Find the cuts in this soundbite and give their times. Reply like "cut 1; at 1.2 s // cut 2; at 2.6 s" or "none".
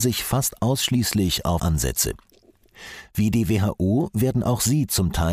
cut 1; at 1.6 s